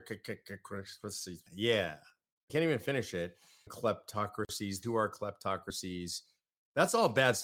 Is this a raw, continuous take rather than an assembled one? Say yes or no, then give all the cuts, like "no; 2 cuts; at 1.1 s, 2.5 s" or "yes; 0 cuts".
no; 4 cuts; at 1.5 s, 2.5 s, 3.7 s, 4.8 s